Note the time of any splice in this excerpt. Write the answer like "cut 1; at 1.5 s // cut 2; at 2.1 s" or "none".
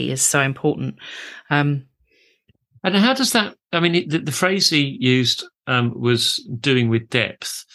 none